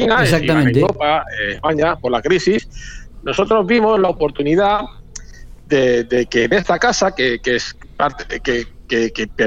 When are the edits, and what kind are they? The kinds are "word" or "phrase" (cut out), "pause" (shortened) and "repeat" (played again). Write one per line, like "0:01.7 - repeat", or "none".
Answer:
none